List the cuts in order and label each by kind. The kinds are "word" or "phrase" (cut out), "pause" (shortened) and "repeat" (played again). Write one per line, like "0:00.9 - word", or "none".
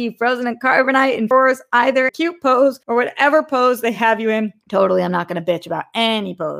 0:01.3 - phrase
0:02.1 - phrase
0:02.8 - pause
0:04.6 - pause